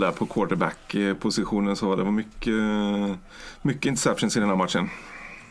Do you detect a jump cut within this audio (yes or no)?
no